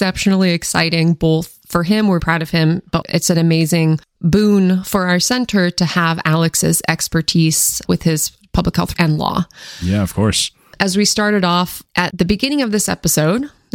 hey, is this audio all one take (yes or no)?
no